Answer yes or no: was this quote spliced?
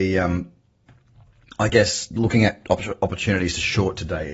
no